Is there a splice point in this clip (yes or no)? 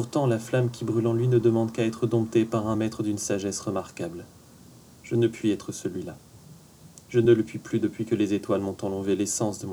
no